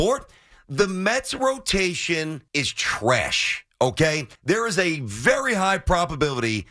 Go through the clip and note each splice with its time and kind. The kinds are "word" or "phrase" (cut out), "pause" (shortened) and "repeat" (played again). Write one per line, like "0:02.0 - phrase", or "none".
0:02.5 - pause
0:04.4 - pause